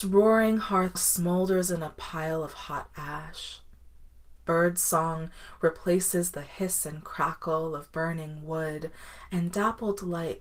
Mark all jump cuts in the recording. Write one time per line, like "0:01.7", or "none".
0:00.9